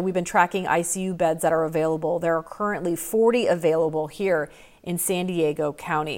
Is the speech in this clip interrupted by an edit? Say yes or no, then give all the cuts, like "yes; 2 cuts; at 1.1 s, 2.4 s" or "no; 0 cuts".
no; 0 cuts